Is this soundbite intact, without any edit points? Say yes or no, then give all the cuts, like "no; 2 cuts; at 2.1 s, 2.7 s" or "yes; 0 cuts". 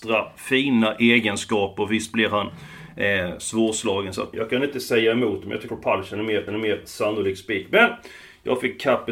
no; 3 cuts; at 4.3 s, 5.7 s, 6.5 s